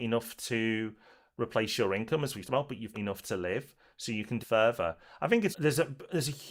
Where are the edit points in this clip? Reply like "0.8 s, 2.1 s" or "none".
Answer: 2.4 s, 2.9 s, 4.4 s, 5.5 s